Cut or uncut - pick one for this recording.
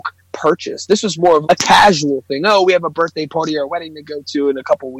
cut